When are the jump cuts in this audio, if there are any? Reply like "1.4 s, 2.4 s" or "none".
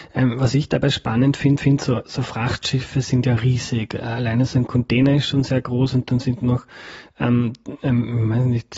1.6 s